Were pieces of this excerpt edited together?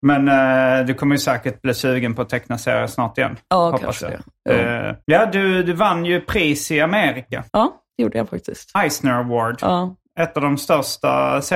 yes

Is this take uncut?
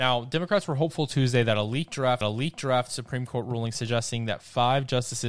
no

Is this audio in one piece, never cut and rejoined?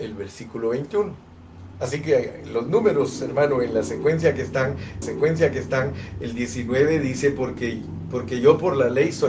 no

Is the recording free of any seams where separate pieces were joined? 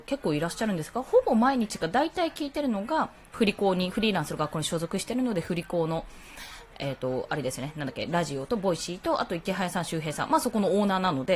no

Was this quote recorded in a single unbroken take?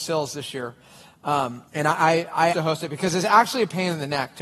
no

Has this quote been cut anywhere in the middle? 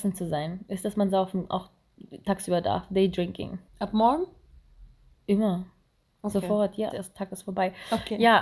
yes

